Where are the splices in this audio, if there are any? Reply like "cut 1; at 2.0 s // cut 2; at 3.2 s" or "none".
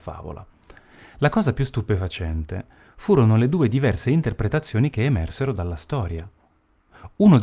none